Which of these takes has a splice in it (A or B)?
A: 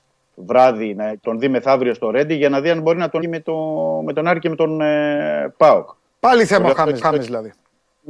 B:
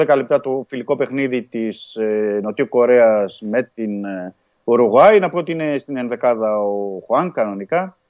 A